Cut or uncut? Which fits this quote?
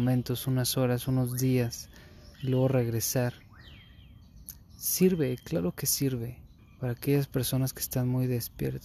cut